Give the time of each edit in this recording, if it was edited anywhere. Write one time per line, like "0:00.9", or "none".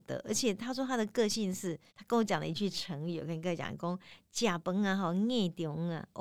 0:01.9